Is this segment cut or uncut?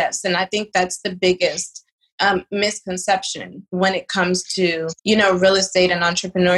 cut